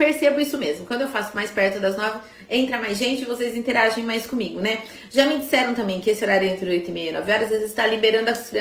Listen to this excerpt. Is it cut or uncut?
uncut